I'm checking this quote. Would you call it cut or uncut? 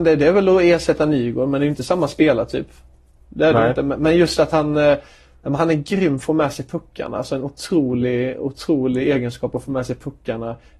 uncut